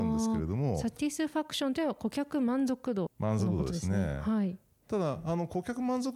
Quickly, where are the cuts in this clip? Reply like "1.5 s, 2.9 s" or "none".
3.1 s